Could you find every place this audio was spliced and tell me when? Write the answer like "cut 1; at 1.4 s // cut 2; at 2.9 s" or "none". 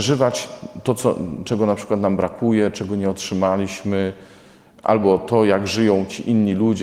none